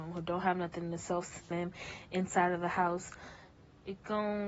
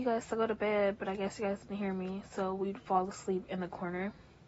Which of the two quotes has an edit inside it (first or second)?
first